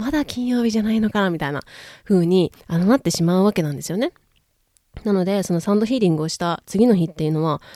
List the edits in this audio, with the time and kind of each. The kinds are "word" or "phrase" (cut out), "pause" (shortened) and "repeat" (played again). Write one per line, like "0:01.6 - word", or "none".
0:02.6 - pause